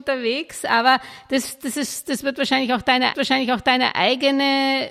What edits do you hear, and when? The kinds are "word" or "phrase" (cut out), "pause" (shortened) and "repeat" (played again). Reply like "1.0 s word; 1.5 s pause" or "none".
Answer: 3.1 s repeat